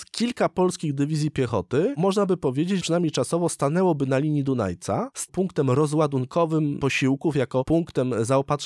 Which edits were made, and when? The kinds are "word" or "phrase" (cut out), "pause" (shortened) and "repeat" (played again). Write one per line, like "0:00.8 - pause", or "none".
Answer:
0:02.8 - word
0:05.3 - phrase